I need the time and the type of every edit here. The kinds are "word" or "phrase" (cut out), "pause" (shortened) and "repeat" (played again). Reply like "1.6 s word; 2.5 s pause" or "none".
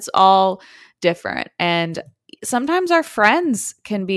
none